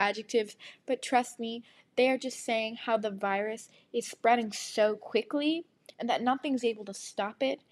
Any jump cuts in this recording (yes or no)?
no